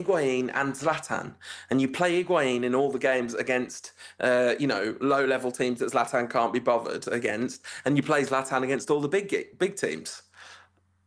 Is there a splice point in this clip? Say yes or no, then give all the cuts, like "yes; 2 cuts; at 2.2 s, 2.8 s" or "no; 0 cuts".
no; 0 cuts